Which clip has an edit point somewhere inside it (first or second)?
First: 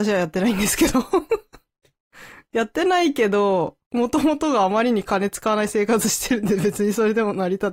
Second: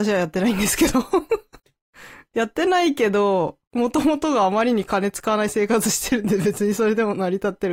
second